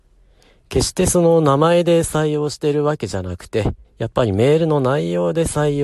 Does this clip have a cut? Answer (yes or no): yes